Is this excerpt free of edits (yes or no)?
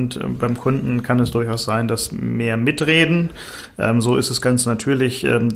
yes